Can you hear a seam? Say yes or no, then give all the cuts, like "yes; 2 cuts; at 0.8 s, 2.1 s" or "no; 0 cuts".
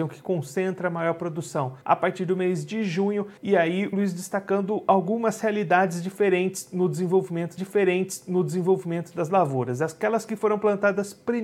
yes; 4 cuts; at 1.8 s, 3.4 s, 3.9 s, 7.6 s